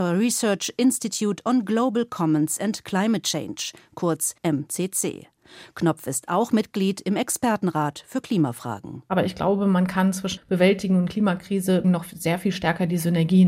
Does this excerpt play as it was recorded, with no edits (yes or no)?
no